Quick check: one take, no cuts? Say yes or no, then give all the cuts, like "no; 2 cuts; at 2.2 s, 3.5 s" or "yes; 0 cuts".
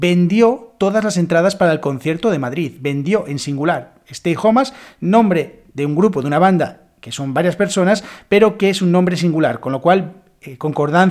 yes; 0 cuts